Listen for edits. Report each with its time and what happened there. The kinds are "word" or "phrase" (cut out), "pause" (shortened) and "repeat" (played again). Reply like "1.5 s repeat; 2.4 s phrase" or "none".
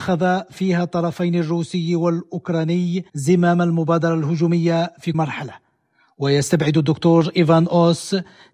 3.1 s pause; 5.1 s word